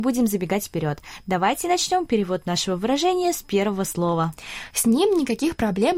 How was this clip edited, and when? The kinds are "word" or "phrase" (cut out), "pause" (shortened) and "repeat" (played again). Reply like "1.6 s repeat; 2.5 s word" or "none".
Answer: none